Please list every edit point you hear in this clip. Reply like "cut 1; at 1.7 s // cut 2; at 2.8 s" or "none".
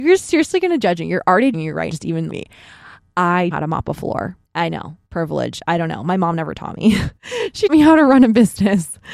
cut 1; at 1.5 s // cut 2; at 1.9 s // cut 3; at 2.3 s // cut 4; at 3.5 s // cut 5; at 4.4 s // cut 6; at 7.2 s // cut 7; at 7.7 s